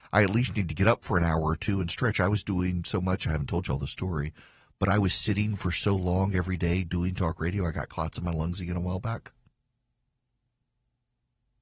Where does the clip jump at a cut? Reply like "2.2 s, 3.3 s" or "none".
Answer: none